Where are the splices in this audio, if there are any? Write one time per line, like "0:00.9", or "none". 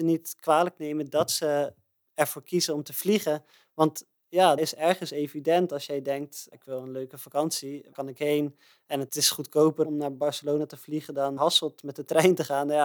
0:04.6
0:06.5
0:07.9
0:11.4